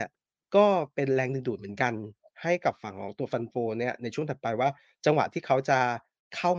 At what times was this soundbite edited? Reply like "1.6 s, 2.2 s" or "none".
none

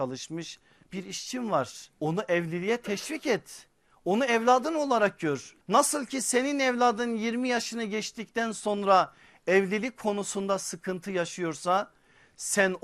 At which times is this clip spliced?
1.9 s, 5.6 s

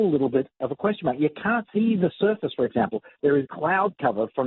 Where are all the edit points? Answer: 1.7 s, 3.5 s

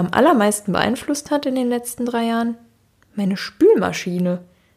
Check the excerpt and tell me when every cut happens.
none

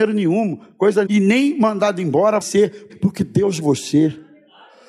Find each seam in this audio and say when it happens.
1.1 s, 2.4 s, 2.9 s, 3.6 s

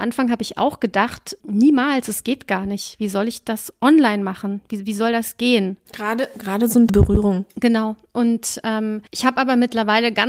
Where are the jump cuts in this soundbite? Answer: 6.9 s, 9.1 s

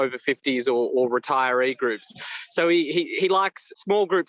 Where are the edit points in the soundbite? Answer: none

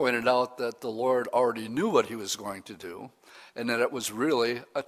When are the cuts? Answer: none

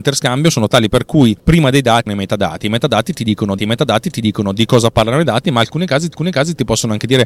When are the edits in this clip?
2.1 s, 3.6 s, 6.1 s

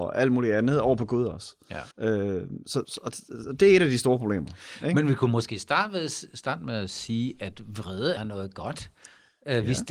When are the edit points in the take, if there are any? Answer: 1.9 s, 2.8 s, 8.2 s

